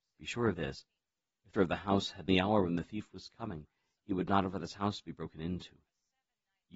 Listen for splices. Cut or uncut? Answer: cut